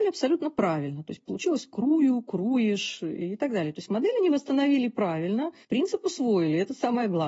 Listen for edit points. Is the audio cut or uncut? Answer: cut